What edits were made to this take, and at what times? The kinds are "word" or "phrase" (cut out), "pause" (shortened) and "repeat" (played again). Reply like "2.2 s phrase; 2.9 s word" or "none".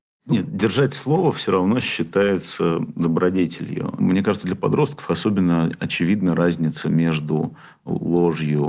none